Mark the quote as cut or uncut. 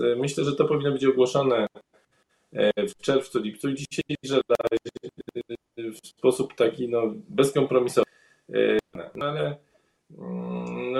uncut